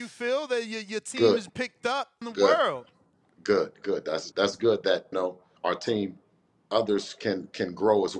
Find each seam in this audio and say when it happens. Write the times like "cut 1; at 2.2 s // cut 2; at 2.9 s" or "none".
cut 1; at 1.5 s // cut 2; at 2.2 s // cut 3; at 4.3 s // cut 4; at 5.1 s // cut 5; at 5.6 s // cut 6; at 6.6 s